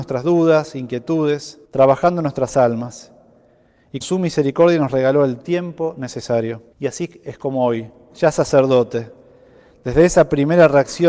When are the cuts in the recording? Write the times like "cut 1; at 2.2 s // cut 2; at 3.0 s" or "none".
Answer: cut 1; at 1.7 s // cut 2; at 4.0 s // cut 3; at 6.7 s